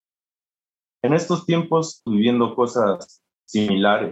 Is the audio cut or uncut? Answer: cut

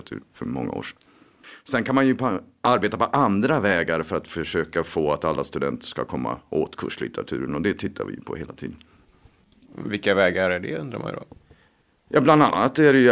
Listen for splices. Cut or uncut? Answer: uncut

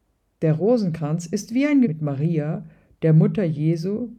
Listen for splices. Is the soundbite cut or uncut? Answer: cut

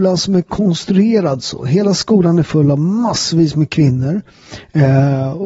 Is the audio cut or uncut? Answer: uncut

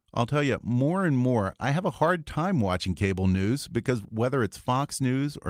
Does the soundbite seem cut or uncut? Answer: uncut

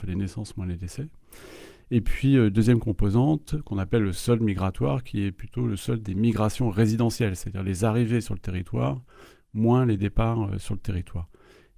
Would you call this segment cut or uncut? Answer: uncut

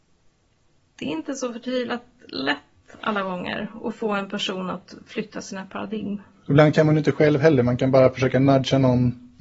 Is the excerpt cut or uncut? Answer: uncut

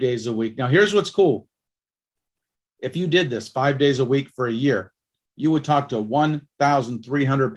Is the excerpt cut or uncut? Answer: uncut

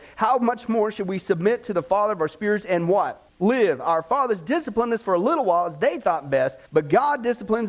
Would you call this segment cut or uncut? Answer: cut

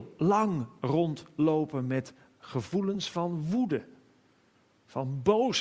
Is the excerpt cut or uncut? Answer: uncut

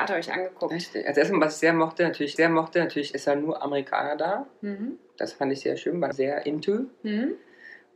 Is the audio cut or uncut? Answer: cut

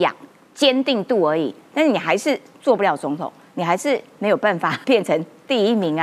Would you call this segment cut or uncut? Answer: cut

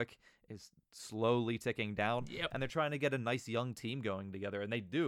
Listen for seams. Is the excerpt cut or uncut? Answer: uncut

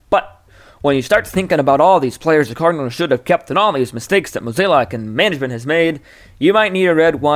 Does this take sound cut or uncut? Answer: uncut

